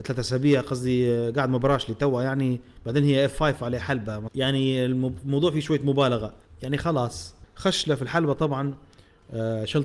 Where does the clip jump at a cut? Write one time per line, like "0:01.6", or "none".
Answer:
none